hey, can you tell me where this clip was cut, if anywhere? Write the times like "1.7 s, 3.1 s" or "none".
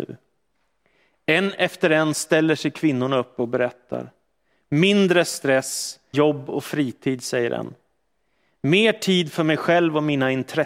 6.1 s